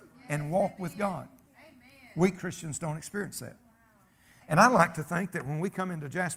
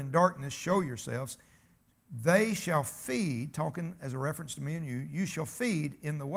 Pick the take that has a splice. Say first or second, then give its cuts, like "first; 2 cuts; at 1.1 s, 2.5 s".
first; 1 cut; at 1.4 s